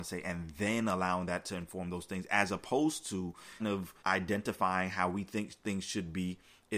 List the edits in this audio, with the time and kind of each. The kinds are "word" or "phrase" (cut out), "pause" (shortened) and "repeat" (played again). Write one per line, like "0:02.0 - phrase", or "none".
0:03.6 - word
0:04.0 - pause